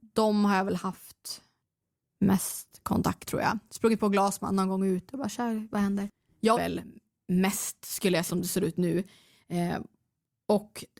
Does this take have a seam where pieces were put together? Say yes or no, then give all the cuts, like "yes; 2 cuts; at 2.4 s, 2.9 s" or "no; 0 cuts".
yes; 4 cuts; at 1.6 s, 3.3 s, 6.5 s, 8.3 s